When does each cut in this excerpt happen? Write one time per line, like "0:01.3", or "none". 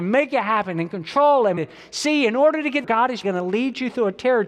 0:01.6
0:02.8
0:03.2

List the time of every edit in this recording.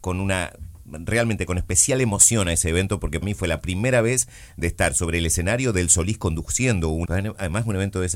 0:03.2
0:07.0

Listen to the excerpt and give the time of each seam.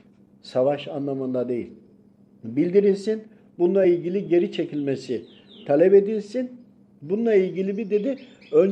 none

